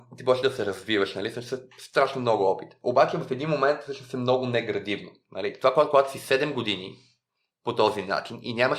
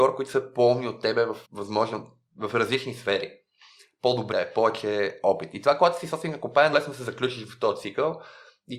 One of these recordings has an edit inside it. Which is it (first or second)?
second